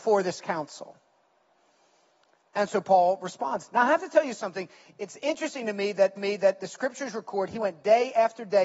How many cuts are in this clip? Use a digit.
1